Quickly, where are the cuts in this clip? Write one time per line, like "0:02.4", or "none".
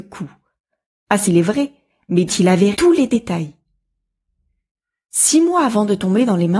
0:01.3
0:02.3
0:02.7